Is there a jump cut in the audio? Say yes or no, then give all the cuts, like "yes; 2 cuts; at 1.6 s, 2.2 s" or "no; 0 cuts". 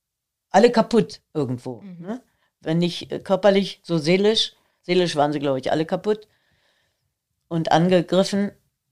no; 0 cuts